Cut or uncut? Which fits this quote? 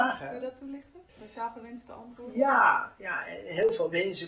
cut